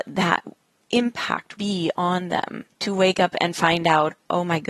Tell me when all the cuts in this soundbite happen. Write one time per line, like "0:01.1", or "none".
0:01.6
0:02.7